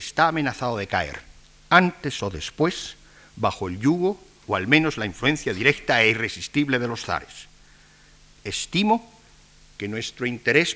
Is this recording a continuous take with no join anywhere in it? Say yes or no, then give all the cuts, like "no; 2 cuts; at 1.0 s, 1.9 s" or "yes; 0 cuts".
yes; 0 cuts